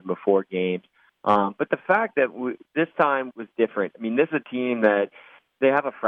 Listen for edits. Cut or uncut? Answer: cut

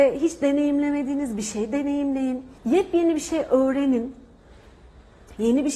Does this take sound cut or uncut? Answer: cut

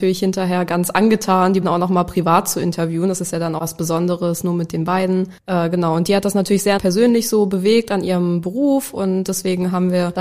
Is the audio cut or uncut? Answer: cut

